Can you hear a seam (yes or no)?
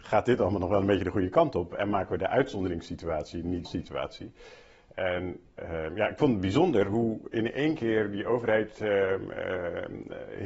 yes